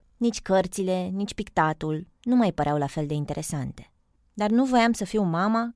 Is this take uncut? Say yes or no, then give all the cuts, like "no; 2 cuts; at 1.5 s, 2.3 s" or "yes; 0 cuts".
yes; 0 cuts